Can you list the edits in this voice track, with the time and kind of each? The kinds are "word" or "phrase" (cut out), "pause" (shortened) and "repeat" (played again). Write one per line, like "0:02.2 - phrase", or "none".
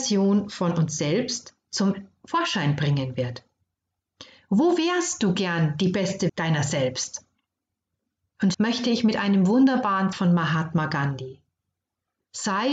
0:06.3 - word
0:08.5 - word
0:10.1 - word